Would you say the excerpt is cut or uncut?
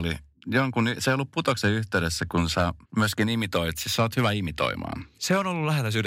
cut